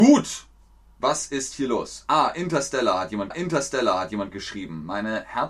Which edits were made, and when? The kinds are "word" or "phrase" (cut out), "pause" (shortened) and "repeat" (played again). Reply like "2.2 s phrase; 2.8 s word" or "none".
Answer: 3.3 s repeat